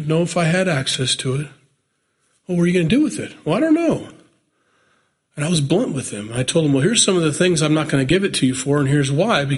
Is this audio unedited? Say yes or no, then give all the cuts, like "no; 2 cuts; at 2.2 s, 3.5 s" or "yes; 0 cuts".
yes; 0 cuts